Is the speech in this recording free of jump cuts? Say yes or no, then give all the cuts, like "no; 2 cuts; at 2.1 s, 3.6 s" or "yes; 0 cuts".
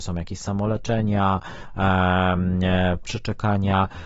no; 1 cut; at 3.0 s